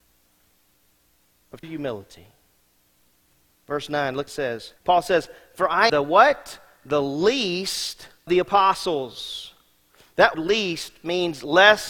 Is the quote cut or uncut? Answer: cut